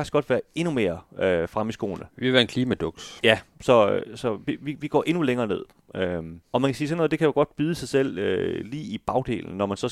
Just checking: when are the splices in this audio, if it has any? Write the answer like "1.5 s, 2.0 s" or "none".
6.4 s